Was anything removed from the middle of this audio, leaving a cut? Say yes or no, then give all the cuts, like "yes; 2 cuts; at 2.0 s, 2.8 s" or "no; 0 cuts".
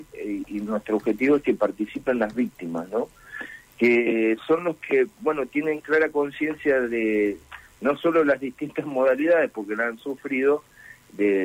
no; 0 cuts